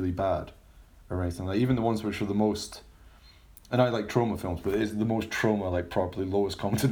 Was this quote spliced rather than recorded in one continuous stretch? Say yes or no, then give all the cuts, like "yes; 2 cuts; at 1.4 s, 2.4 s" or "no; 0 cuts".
no; 0 cuts